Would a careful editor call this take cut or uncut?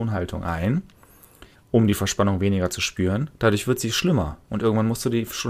cut